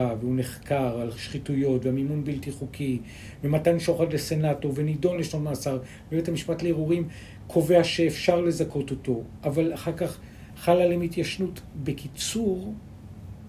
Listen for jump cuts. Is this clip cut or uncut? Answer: uncut